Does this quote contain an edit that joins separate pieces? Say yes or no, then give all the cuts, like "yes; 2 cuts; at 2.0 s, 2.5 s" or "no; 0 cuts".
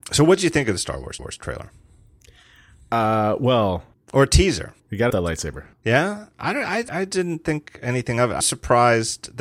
yes; 6 cuts; at 1.2 s, 4.8 s, 5.1 s, 5.7 s, 6.9 s, 8.4 s